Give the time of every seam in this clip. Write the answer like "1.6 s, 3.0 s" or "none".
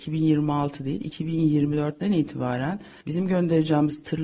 none